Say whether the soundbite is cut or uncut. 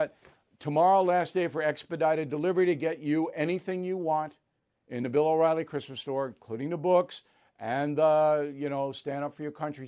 uncut